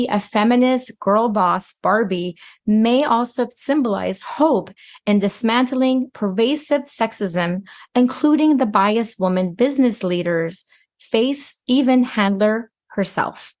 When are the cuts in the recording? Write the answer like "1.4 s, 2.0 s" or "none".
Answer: none